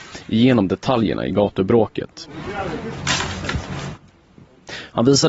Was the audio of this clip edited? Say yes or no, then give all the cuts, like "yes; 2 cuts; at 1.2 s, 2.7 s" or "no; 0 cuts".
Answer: no; 0 cuts